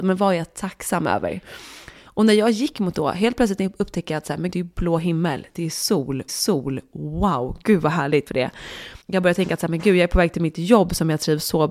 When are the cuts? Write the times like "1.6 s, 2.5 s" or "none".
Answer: 2.9 s, 4.5 s, 6.3 s, 8.3 s, 9.0 s

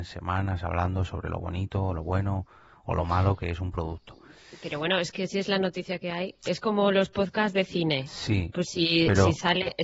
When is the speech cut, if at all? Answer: none

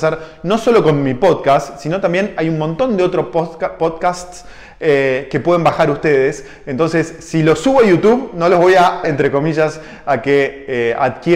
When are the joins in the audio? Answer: 9.0 s

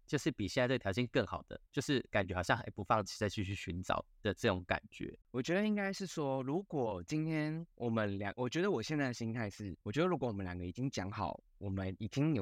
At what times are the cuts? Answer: 1.7 s, 5.2 s, 7.7 s, 9.8 s

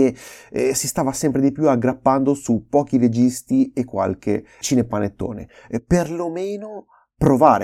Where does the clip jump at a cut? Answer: 4.6 s

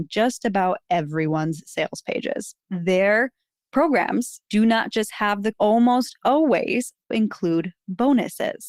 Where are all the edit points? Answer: 2.6 s, 4.4 s, 5.5 s, 7.1 s

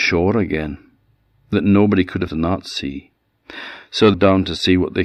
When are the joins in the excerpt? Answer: 1.5 s, 2.3 s, 4.1 s

